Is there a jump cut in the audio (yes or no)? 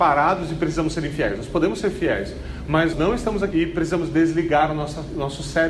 yes